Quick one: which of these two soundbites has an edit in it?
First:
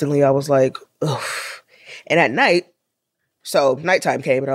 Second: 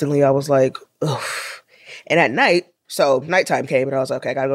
second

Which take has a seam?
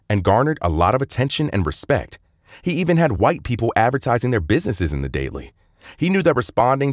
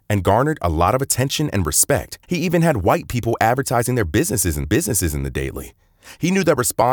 second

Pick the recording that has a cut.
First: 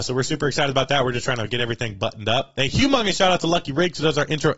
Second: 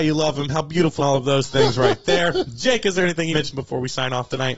second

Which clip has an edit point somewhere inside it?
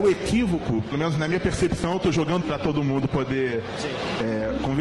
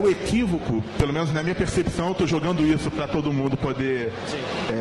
first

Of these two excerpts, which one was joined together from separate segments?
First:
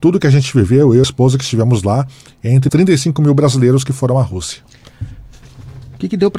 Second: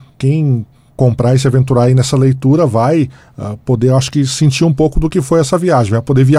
first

